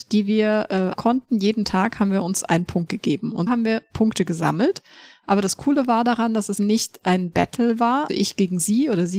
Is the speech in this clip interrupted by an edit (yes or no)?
yes